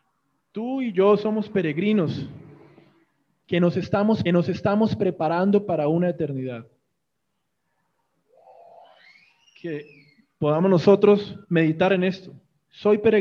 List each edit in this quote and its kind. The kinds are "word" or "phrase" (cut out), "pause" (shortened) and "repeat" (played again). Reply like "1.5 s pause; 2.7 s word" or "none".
4.3 s repeat; 11.4 s pause